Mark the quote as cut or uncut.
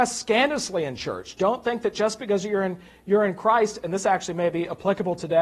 uncut